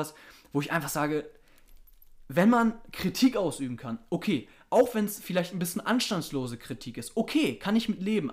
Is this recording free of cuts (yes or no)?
yes